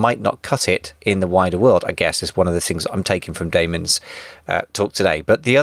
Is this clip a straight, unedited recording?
yes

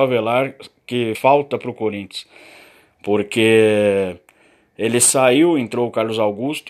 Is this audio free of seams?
no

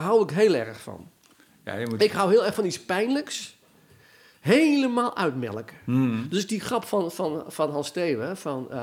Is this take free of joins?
yes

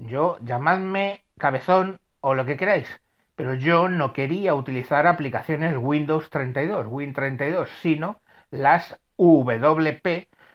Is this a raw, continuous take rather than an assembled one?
yes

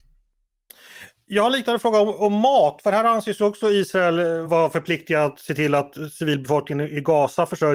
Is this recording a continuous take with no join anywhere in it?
no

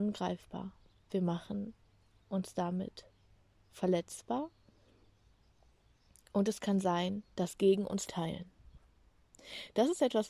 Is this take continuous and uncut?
no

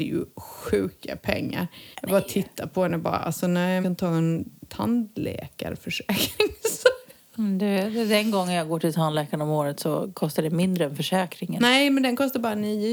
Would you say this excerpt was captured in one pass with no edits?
no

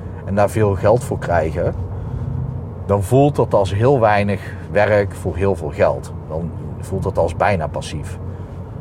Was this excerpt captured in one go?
yes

